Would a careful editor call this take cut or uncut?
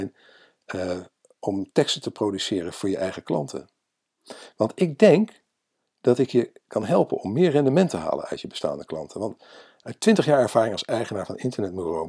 uncut